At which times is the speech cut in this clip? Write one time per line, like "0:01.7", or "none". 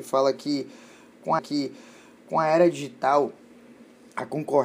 0:01.4